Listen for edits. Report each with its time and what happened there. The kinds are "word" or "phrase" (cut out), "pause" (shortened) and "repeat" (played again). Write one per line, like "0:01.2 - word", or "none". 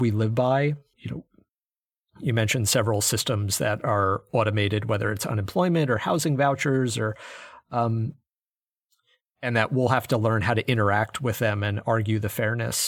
0:00.9 - word